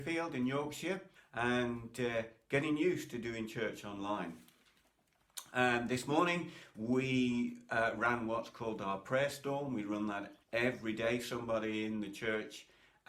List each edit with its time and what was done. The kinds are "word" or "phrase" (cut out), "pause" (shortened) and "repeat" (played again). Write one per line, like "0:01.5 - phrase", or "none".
0:01.2 - pause
0:10.4 - pause

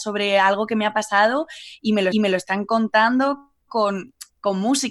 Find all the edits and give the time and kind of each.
0:02.1 - repeat

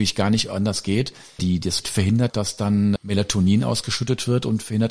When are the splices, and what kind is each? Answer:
0:01.4 - word
0:01.8 - word
0:02.3 - word
0:03.0 - word

